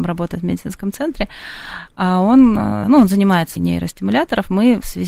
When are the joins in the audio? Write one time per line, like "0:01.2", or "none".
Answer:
0:02.8
0:03.6

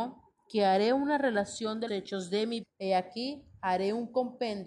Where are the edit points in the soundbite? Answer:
0:01.9
0:02.6

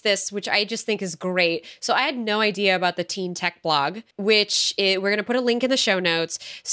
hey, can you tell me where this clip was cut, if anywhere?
0:04.1

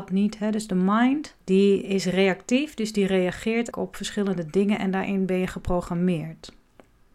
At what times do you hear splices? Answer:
0:01.4
0:03.7

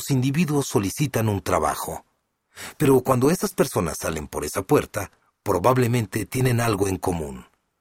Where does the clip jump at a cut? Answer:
0:05.2

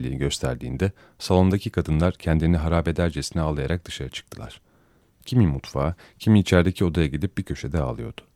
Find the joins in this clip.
none

